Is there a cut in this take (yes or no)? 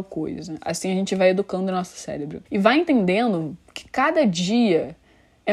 yes